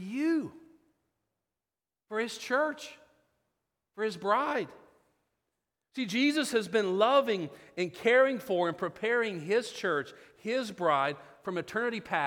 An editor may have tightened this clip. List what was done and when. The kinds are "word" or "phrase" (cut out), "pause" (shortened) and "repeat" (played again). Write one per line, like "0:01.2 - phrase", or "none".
none